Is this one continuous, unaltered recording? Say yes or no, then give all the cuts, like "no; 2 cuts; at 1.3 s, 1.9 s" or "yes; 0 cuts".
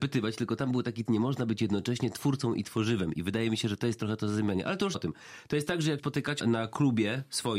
no; 4 cuts; at 1.1 s, 4.9 s, 6.0 s, 6.4 s